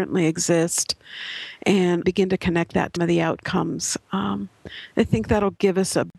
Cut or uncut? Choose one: cut